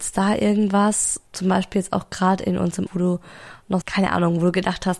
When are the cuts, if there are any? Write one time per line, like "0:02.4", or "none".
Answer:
0:01.3
0:02.9
0:03.8